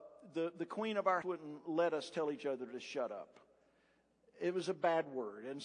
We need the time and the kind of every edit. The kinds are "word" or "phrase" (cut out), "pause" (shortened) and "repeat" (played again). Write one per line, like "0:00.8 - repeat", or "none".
0:01.2 - word